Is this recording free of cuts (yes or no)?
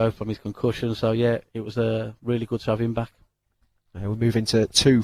yes